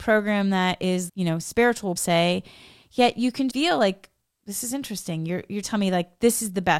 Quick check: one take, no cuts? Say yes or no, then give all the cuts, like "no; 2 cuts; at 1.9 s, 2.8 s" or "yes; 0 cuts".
no; 4 cuts; at 1.1 s, 2.0 s, 3.5 s, 5.6 s